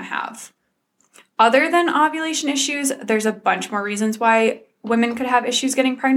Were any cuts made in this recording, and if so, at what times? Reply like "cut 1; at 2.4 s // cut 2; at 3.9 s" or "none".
none